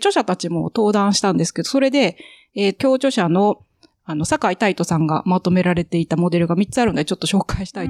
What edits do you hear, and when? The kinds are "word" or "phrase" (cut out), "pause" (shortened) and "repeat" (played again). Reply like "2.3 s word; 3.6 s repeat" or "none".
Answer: 2.8 s word